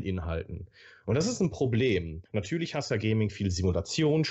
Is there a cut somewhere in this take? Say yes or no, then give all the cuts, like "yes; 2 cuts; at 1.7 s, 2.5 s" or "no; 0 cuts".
yes; 2 cuts; at 2.3 s, 2.9 s